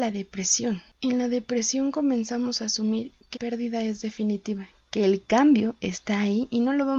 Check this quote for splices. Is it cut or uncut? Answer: cut